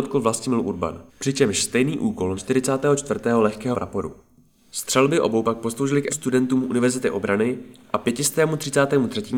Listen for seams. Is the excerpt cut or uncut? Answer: cut